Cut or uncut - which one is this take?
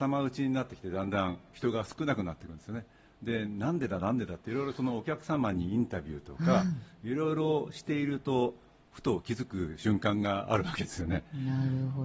uncut